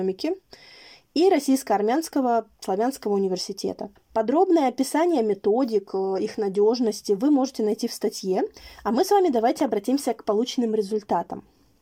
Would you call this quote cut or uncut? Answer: cut